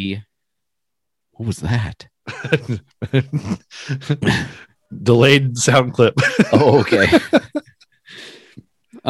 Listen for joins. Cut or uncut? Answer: uncut